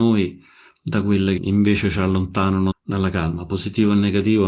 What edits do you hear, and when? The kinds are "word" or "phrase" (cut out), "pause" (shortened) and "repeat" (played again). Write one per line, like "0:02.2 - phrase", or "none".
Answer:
0:01.4 - word
0:02.7 - word